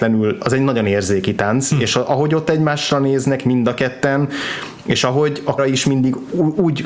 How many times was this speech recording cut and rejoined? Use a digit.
1